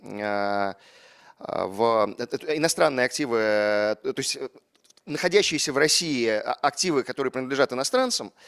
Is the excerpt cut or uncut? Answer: uncut